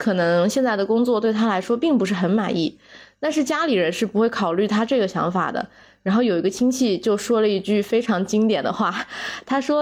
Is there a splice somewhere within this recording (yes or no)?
no